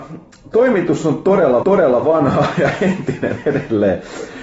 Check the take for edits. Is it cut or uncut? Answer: cut